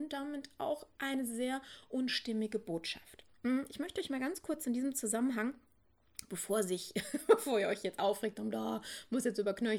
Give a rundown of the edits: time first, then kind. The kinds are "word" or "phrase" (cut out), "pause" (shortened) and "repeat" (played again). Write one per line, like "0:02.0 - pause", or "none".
none